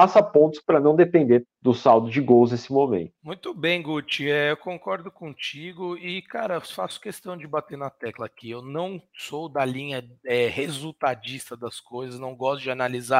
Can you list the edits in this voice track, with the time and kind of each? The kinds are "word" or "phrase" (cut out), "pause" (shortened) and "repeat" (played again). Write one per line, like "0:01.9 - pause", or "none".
0:01.4 - word
0:03.2 - pause
0:09.1 - pause